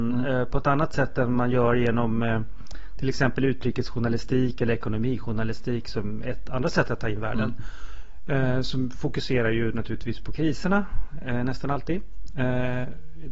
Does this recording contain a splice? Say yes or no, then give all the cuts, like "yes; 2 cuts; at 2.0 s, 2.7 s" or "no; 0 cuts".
no; 0 cuts